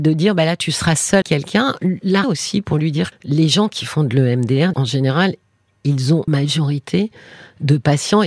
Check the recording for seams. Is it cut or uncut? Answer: cut